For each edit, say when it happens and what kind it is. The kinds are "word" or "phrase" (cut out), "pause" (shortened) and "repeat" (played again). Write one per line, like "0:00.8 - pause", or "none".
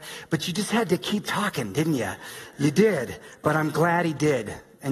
none